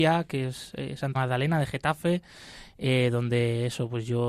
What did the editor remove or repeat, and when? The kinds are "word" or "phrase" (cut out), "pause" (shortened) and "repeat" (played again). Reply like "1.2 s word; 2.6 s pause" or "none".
1.1 s word

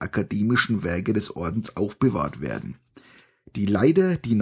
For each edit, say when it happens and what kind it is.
none

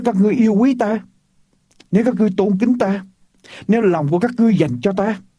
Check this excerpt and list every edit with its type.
none

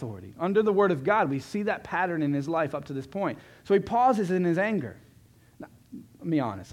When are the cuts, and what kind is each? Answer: none

